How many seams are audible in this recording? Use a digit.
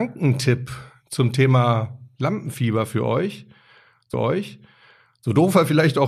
1